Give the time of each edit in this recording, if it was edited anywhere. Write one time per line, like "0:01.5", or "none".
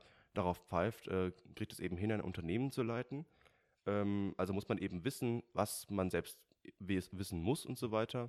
none